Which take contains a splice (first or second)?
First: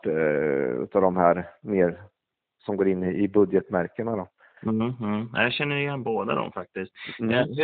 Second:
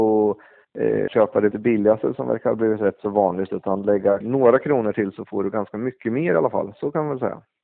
second